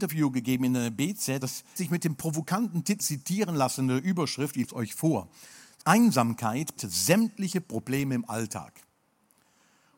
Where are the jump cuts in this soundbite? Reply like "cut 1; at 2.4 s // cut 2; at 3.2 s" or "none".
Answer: cut 1; at 1.4 s // cut 2; at 1.8 s // cut 3; at 3.0 s // cut 4; at 4.6 s // cut 5; at 5.8 s // cut 6; at 6.8 s

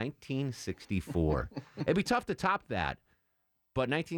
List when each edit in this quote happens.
none

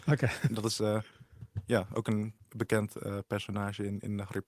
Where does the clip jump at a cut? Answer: cut 1; at 2.4 s

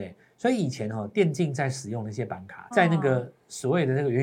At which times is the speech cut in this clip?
cut 1; at 2.7 s

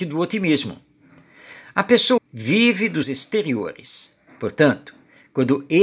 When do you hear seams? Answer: cut 1; at 2.2 s // cut 2; at 3.0 s

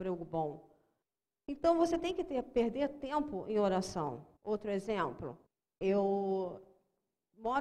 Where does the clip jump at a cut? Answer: cut 1; at 1.0 s // cut 2; at 4.4 s // cut 3; at 5.5 s

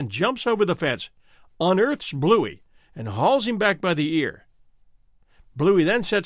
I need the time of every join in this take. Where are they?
none

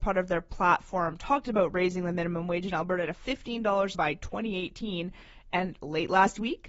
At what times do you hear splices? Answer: cut 1; at 3.9 s

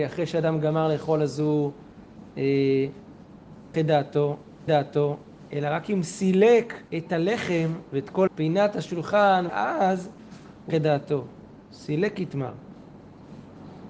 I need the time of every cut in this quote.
cut 1; at 3.7 s // cut 2; at 4.7 s // cut 3; at 6.9 s // cut 4; at 8.3 s // cut 5; at 9.5 s // cut 6; at 10.7 s

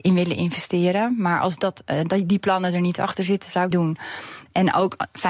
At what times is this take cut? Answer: cut 1; at 3.7 s

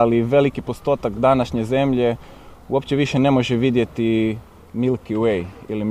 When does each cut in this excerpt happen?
none

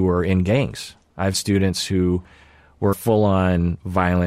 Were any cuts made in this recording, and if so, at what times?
cut 1; at 1.3 s // cut 2; at 2.9 s

